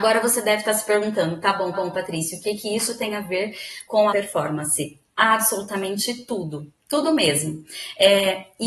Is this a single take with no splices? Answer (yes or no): no